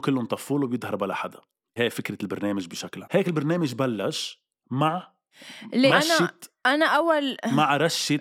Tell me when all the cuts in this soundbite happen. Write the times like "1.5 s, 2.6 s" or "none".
1.8 s, 3.0 s, 5.9 s